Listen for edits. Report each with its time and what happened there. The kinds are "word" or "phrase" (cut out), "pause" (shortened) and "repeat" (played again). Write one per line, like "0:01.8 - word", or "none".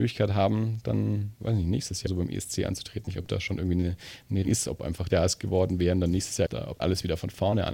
0:01.4 - word
0:02.1 - word
0:03.1 - phrase
0:04.4 - word
0:05.1 - phrase
0:06.5 - phrase
0:06.8 - word